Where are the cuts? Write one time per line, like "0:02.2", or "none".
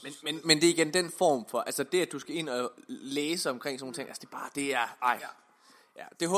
none